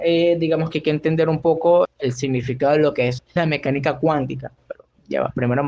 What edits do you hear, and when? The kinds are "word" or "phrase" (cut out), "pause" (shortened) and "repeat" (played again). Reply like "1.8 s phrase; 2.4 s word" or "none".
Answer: 1.8 s word; 3.2 s word